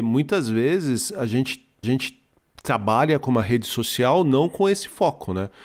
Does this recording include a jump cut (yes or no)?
yes